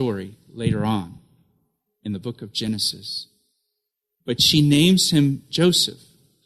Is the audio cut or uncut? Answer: uncut